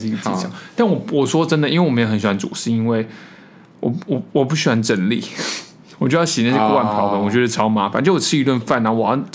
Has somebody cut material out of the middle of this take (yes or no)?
no